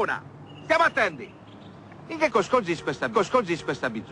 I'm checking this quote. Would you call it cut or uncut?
cut